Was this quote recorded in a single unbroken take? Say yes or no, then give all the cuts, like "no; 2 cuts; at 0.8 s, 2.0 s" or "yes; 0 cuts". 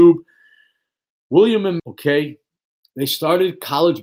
no; 1 cut; at 1.8 s